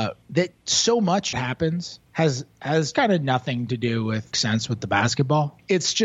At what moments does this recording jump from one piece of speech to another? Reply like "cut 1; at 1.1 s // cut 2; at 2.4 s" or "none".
cut 1; at 1.3 s // cut 2; at 2.9 s // cut 3; at 4.3 s